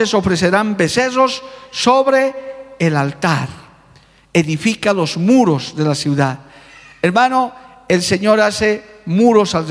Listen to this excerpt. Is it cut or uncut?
uncut